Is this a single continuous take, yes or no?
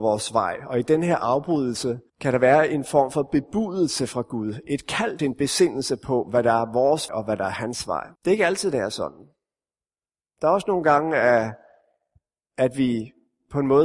no